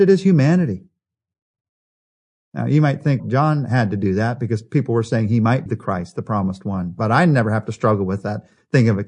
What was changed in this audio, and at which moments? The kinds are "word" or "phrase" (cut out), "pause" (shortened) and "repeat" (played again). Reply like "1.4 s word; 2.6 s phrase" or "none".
3.2 s word; 5.7 s word

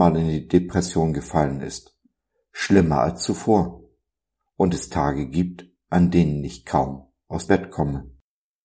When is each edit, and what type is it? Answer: 7.5 s word

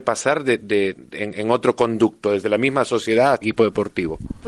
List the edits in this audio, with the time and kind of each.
3.4 s word

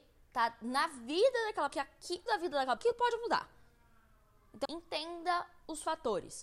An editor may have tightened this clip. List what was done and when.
1.7 s word; 2.3 s word; 2.8 s word; 4.7 s word

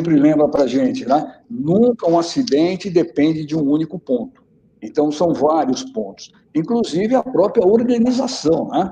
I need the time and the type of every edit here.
none

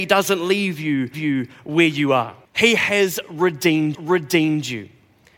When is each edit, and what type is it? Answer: 1.1 s repeat; 2.4 s pause; 3.9 s repeat

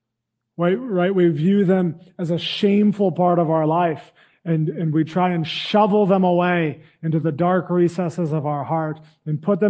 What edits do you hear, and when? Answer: none

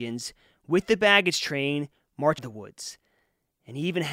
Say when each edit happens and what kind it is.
2.4 s word

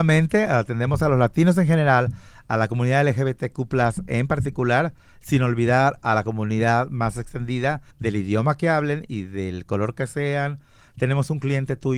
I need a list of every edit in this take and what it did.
7.9 s pause

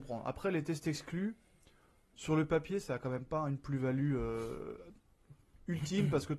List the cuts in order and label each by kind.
none

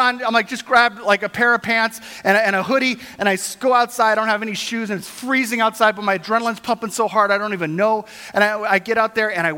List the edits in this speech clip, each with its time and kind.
none

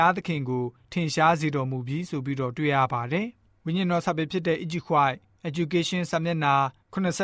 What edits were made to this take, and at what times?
none

